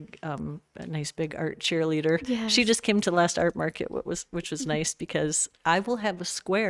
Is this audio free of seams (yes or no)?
yes